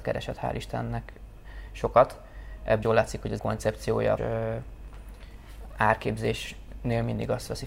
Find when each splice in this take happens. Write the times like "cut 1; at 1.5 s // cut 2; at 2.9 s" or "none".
cut 1; at 2.8 s // cut 2; at 3.4 s // cut 3; at 4.2 s